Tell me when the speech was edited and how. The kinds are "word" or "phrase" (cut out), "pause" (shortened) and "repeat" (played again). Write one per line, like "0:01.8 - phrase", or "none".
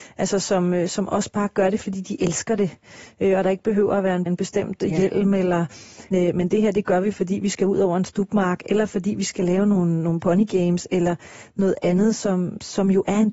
0:04.3 - phrase
0:06.1 - word